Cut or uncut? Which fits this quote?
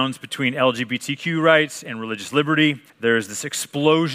cut